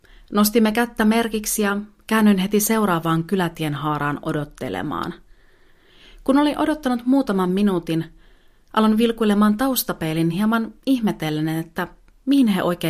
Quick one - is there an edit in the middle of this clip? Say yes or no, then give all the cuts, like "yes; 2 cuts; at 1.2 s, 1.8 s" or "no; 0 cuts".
no; 0 cuts